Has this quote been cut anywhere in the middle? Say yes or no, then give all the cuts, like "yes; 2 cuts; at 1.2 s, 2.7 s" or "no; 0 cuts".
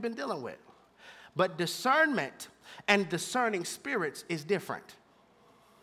no; 0 cuts